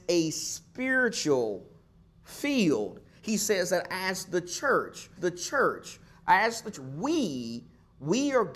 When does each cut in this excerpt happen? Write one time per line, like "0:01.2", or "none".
0:05.2
0:06.7